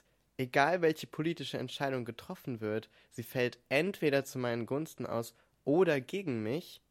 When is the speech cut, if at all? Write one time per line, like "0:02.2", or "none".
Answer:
none